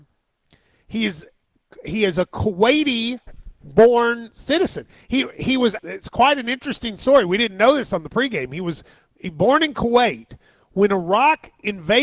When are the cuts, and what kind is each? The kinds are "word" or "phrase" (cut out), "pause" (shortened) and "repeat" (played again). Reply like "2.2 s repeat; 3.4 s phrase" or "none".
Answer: 5.8 s word